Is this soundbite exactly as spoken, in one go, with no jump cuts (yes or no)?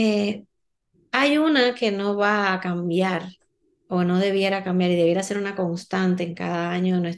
yes